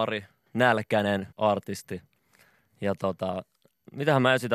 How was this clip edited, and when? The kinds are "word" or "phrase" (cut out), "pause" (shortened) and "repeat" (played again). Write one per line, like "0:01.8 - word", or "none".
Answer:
0:01.3 - pause

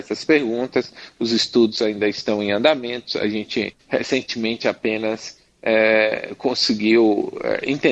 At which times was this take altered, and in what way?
0:03.8 - pause

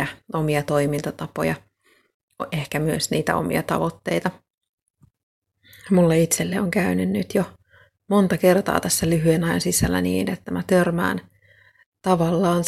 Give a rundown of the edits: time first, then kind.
none

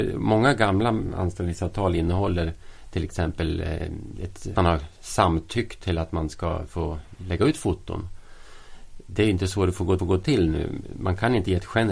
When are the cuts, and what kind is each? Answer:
0:04.5 - word
0:10.0 - repeat

